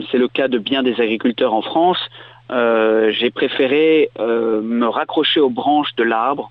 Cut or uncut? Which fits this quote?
uncut